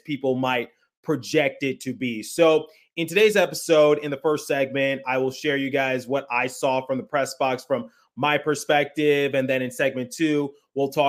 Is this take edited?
no; 0 cuts

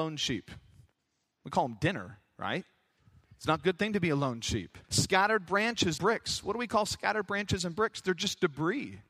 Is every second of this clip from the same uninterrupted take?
no; 3 cuts; at 3.0 s, 4.8 s, 6.0 s

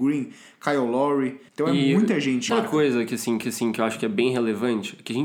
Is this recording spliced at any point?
yes; 3 cuts; at 1.5 s, 2.5 s, 3.4 s

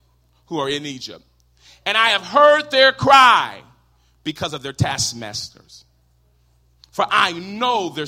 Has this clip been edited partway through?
no; 0 cuts

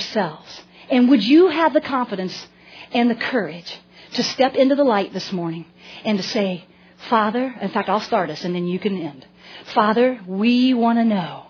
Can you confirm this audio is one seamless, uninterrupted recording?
yes; 0 cuts

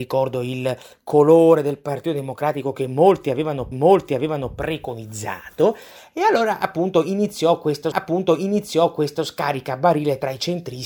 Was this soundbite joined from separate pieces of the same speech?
yes; 2 cuts; at 3.7 s, 7.9 s

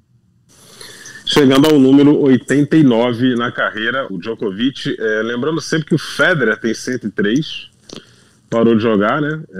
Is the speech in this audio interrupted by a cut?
yes; 2 cuts; at 1.2 s, 4.1 s

